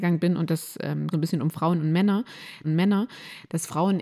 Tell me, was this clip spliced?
yes; 2 cuts; at 1.1 s, 2.6 s

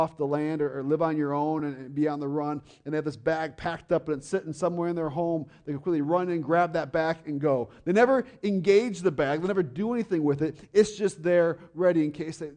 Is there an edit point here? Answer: no; 0 cuts

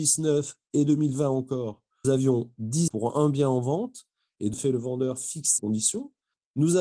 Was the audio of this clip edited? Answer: yes; 4 cuts; at 2.0 s, 2.9 s, 4.5 s, 5.6 s

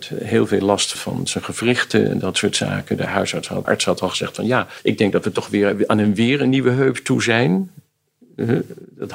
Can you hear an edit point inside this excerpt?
yes; 2 cuts; at 0.9 s, 3.6 s

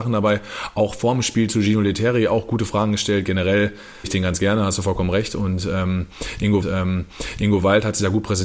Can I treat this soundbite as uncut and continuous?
no; 2 cuts; at 4.0 s, 6.6 s

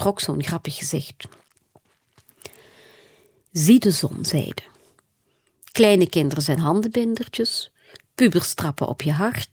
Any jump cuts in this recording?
no; 0 cuts

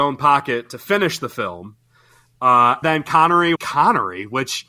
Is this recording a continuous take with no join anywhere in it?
no; 2 cuts; at 2.8 s, 3.6 s

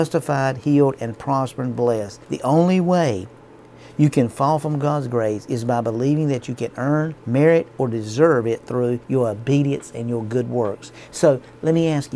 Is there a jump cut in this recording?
yes; 3 cuts; at 2.2 s, 7.2 s, 9.0 s

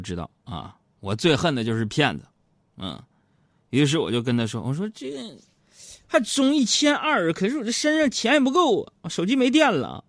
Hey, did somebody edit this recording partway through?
no; 0 cuts

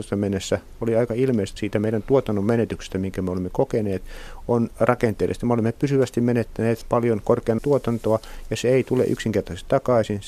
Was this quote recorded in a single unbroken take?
no; 3 cuts; at 1.6 s, 6.8 s, 7.6 s

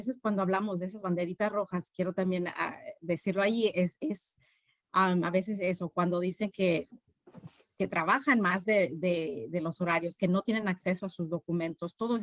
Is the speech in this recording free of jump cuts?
yes; 0 cuts

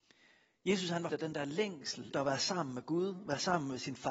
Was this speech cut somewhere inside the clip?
yes; 2 cuts; at 1.1 s, 2.1 s

